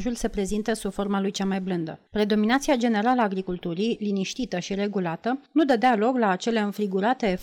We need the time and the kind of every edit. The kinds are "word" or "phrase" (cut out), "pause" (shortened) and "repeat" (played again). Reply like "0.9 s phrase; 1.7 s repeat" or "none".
2.1 s pause; 5.5 s pause